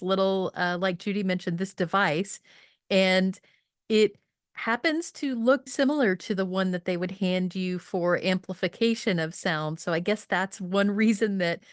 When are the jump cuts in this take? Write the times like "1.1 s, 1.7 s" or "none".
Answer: 5.7 s